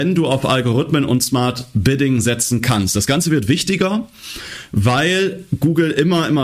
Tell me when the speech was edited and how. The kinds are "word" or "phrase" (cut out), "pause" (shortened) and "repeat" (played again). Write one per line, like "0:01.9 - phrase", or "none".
none